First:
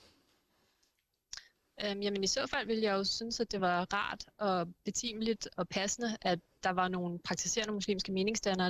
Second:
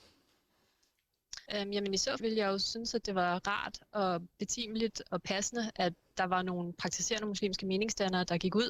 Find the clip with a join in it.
second; 2 cuts; at 1.5 s, 2.2 s

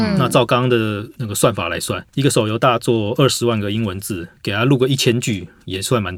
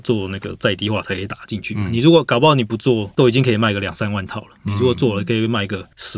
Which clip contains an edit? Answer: first; 1 cut; at 4.4 s

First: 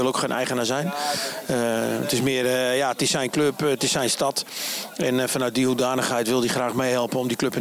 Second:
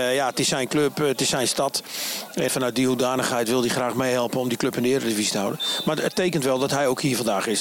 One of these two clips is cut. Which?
second; 1 cut; at 2.5 s

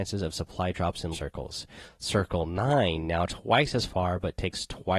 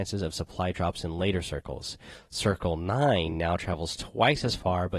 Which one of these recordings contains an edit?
first; 2 cuts; at 1.1 s, 3.3 s

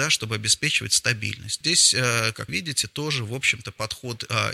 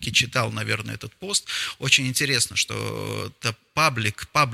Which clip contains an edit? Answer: first; 2 cuts; at 1.6 s, 2.5 s

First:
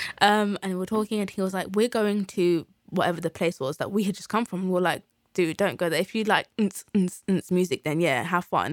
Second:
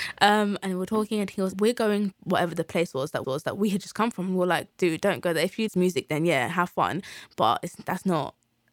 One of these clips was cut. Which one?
second; 5 cuts; at 1.5 s, 2.1 s, 3.2 s, 4.7 s, 5.7 s

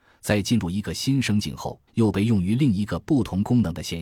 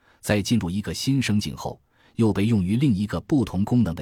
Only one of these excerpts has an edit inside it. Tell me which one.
first; 1 cut; at 1.9 s

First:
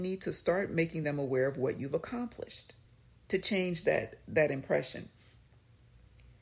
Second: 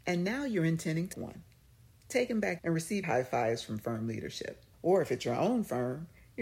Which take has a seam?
second; 4 cuts; at 1.1 s, 2.6 s, 3.0 s, 4.7 s

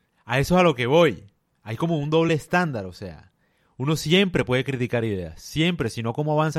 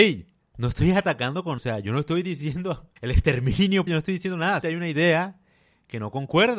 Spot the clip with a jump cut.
second; 4 cuts; at 1.6 s, 3.0 s, 3.9 s, 4.6 s

